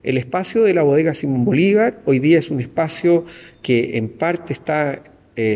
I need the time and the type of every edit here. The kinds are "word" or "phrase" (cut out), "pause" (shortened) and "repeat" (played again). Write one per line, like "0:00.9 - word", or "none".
none

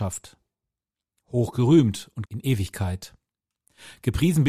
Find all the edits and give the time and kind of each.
0:02.3 - word

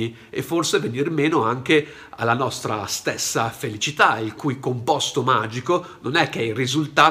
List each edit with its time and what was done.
none

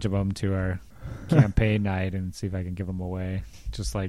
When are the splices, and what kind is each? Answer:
none

